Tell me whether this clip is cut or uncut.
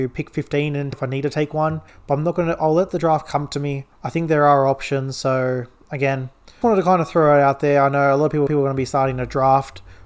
cut